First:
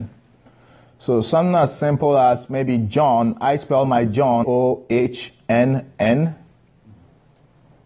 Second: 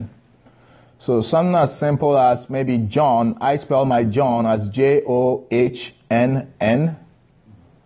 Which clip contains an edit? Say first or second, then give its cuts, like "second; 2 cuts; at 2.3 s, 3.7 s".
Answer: first; 1 cut; at 4.4 s